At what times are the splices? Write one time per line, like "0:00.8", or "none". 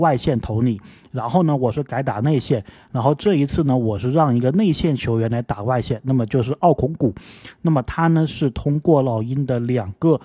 none